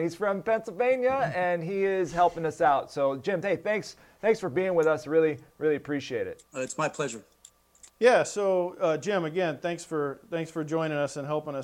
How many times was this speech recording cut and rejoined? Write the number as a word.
two